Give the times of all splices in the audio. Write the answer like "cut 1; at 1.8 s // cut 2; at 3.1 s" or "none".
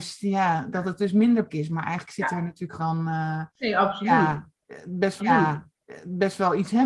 cut 1; at 1.5 s // cut 2; at 2.8 s // cut 3; at 5.2 s